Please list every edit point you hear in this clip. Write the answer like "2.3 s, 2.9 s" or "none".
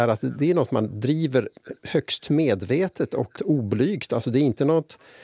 3.3 s

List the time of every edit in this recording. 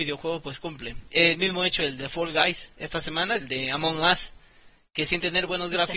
3.4 s

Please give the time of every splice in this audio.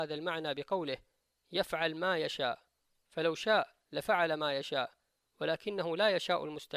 none

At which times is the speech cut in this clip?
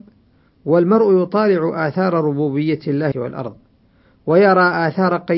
3.1 s

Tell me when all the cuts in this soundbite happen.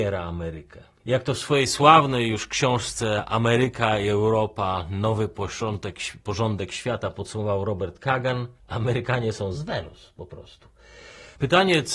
1.0 s, 8.6 s, 9.5 s

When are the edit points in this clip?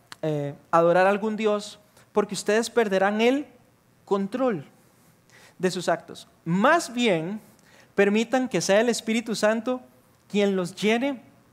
none

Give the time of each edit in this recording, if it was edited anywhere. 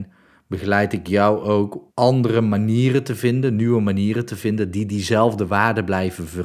1.9 s

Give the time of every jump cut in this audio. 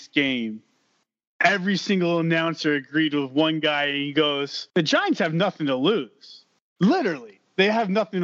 4.7 s, 6.6 s

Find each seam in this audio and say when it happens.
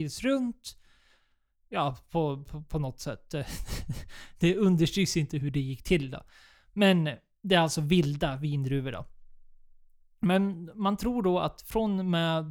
none

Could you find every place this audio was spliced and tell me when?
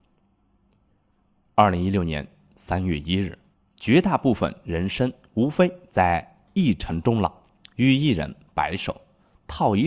3.5 s

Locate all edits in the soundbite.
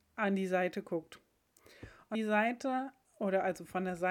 2.1 s

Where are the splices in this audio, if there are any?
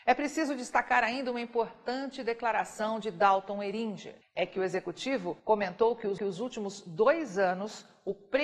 4.2 s, 5.4 s, 6.2 s

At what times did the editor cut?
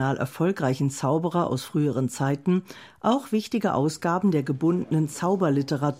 none

